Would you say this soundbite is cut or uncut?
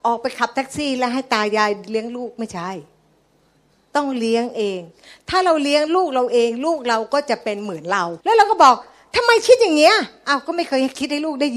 cut